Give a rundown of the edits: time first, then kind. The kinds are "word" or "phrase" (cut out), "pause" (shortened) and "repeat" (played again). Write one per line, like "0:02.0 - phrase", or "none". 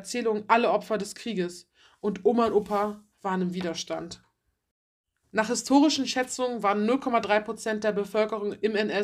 0:03.1 - pause